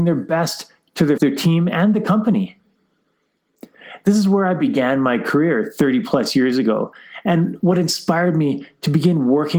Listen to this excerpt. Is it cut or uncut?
cut